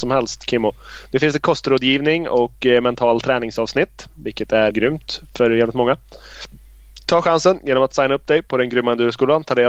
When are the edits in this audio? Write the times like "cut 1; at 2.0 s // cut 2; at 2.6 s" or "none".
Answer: cut 1; at 4.7 s